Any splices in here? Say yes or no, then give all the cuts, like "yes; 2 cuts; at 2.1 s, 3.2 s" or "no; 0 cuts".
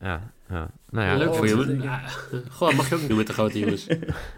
yes; 1 cut; at 3.1 s